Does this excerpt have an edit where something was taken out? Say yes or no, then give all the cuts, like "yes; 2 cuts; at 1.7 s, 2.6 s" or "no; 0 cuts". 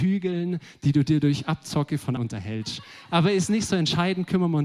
yes; 1 cut; at 2.2 s